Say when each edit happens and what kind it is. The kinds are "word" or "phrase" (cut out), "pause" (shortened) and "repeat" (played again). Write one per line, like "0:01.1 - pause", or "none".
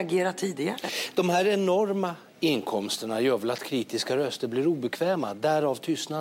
none